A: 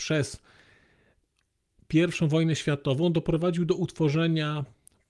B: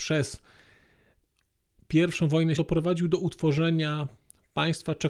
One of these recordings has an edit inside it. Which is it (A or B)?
B